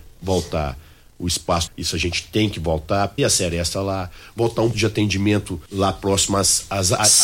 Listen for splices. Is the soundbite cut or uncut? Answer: cut